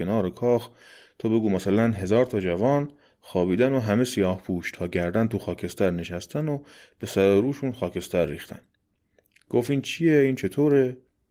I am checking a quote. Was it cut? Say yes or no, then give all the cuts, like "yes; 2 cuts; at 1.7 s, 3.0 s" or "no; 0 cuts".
no; 0 cuts